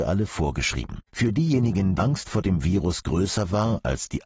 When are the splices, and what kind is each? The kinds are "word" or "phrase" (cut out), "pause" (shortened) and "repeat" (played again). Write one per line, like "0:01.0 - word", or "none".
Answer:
0:01.1 - pause
0:02.0 - word